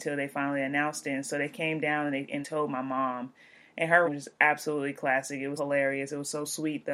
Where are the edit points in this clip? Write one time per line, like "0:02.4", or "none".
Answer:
0:02.4
0:04.0
0:05.6